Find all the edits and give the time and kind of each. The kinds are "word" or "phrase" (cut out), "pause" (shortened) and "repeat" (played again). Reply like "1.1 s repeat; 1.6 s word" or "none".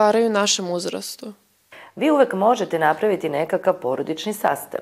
none